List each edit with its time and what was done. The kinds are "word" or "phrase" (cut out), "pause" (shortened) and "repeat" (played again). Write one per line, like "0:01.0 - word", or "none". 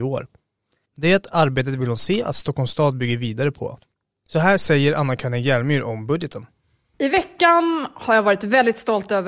none